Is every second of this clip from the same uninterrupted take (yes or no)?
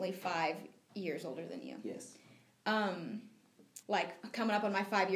no